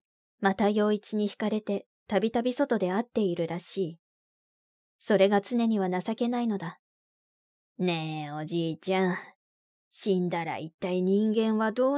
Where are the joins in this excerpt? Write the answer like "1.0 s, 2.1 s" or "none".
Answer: none

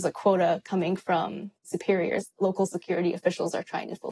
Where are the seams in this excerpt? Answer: 2.3 s

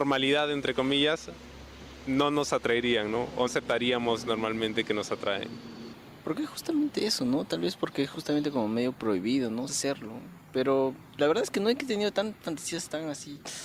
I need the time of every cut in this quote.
3.5 s, 9.7 s

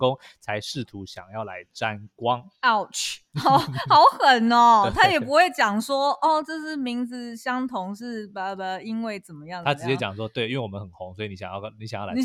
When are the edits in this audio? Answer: none

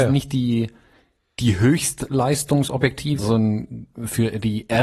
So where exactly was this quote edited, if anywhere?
3.2 s

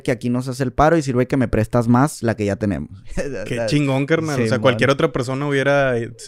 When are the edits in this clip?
none

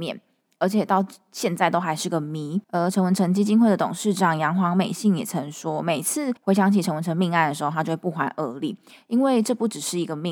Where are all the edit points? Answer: 2.6 s, 6.4 s

